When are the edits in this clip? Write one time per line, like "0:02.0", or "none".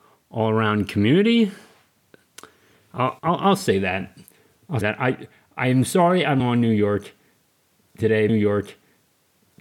0:03.2
0:04.8
0:06.4
0:08.3